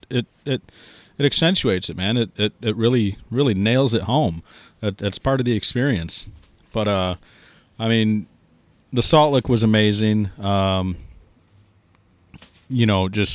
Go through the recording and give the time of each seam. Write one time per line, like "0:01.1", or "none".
none